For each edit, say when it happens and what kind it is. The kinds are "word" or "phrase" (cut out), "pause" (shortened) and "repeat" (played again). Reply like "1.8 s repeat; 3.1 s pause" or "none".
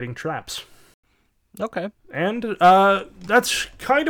2.0 s pause